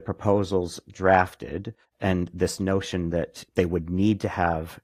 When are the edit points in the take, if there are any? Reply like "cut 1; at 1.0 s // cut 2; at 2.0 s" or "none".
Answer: cut 1; at 1.8 s